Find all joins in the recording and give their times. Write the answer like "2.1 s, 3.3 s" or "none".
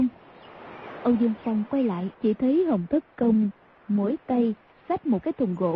2.1 s